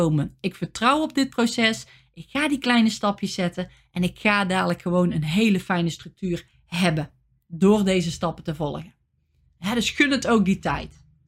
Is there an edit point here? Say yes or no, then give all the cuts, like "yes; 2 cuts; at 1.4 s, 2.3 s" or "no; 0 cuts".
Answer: no; 0 cuts